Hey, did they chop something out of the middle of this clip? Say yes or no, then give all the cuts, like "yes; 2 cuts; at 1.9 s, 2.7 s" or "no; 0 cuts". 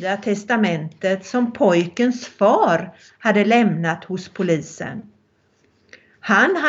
no; 0 cuts